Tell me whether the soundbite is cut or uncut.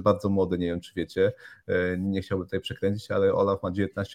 uncut